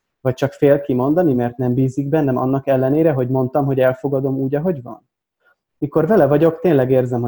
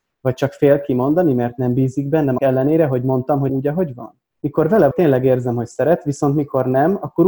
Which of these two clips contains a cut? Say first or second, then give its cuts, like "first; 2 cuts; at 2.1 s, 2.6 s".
second; 4 cuts; at 2.4 s, 3.5 s, 4.3 s, 4.9 s